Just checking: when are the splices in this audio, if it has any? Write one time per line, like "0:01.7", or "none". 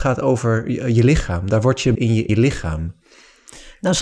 0:01.9
0:02.3